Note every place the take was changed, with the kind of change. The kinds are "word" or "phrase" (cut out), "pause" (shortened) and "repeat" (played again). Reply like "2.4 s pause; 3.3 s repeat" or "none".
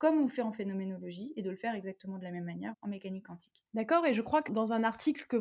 2.7 s word; 3.7 s pause; 4.5 s word